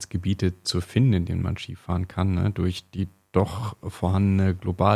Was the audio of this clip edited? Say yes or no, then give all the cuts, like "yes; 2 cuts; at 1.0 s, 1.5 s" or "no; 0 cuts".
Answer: no; 0 cuts